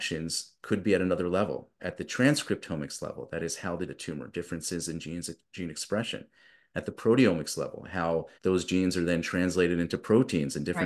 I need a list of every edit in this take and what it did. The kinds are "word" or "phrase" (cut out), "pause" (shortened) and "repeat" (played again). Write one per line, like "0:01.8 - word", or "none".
0:01.8 - word
0:03.9 - phrase
0:08.3 - pause